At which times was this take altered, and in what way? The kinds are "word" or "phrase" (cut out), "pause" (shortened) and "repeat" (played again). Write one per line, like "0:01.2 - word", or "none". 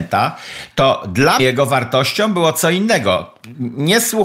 0:01.4 - word